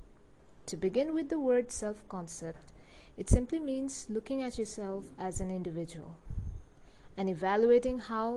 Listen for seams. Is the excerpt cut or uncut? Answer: uncut